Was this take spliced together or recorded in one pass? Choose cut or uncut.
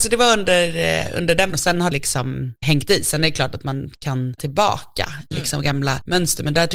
cut